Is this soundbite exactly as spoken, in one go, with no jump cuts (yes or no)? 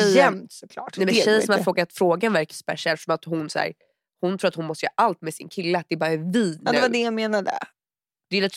no